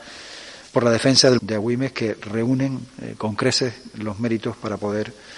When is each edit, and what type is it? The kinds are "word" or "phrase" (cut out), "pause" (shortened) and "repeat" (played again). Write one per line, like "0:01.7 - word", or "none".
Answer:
0:01.4 - word